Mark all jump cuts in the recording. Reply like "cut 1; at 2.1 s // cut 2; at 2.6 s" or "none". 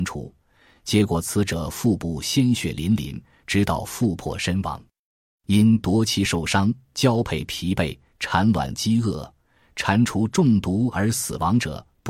none